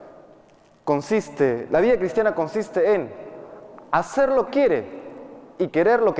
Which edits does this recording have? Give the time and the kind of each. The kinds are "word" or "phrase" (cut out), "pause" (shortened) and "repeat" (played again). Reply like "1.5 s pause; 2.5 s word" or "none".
4.5 s word